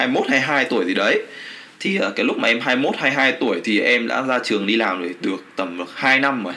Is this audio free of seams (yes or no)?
yes